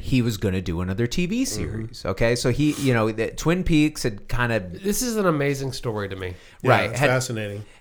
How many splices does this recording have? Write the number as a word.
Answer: zero